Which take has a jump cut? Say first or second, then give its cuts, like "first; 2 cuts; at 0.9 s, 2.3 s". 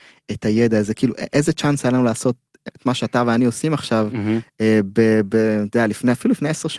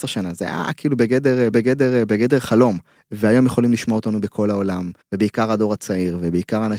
second; 3 cuts; at 1.5 s, 3.0 s, 5.0 s